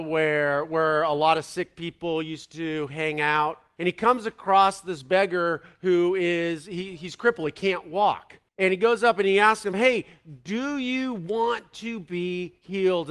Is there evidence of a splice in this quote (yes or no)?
yes